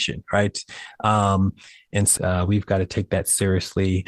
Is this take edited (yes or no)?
yes